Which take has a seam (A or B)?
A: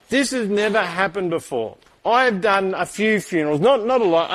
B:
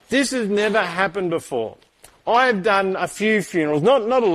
A